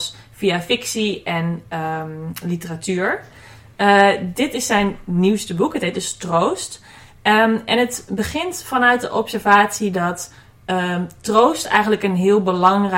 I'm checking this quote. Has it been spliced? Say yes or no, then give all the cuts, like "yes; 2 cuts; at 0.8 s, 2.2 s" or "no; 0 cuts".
no; 0 cuts